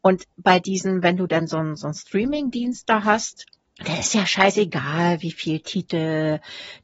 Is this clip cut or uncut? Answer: cut